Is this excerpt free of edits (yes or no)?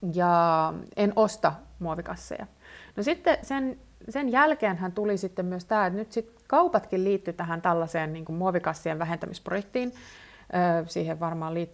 yes